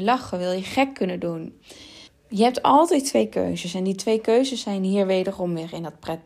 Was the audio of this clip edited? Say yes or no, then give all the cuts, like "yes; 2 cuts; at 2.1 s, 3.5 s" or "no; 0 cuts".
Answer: yes; 1 cut; at 2.1 s